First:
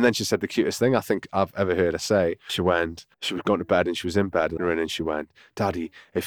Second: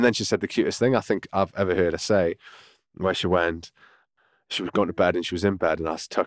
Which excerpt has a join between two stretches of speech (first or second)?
first